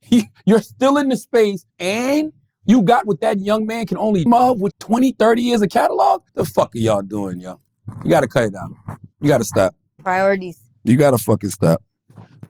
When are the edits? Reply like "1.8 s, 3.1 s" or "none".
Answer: 1.7 s, 4.3 s, 4.7 s, 6.3 s, 9.1 s